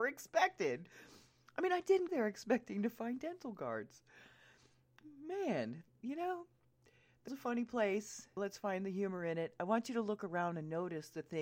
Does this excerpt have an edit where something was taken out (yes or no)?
yes